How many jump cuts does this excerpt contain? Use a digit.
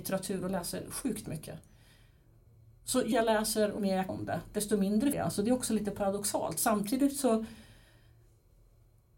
4